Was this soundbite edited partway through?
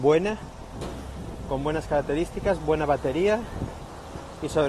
no; 0 cuts

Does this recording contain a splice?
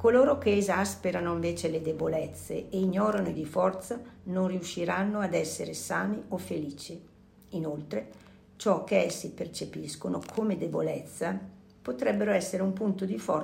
yes; 1 cut; at 3.3 s

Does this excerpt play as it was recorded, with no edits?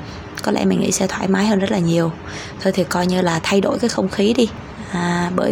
yes; 0 cuts

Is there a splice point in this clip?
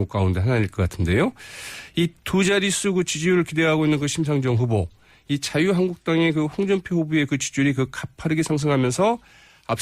no; 0 cuts

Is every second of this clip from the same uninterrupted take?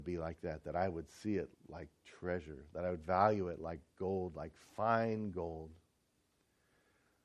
no; 1 cut; at 1.5 s

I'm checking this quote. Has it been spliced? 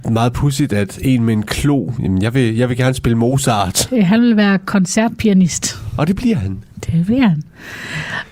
no; 0 cuts

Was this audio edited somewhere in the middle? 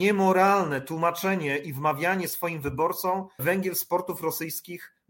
yes; 1 cut; at 3.4 s

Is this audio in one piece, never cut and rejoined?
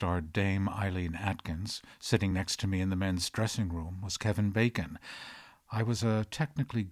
yes; 0 cuts

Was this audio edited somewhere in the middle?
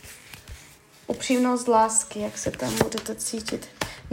no; 0 cuts

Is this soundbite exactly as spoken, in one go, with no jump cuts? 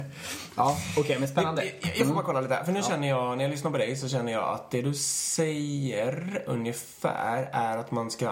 yes; 0 cuts

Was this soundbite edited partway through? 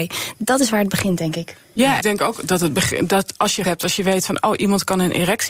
yes; 2 cuts; at 2.0 s, 3.6 s

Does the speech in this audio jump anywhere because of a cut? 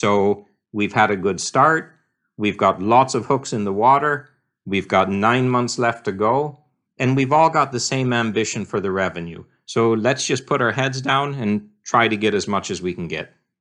no; 0 cuts

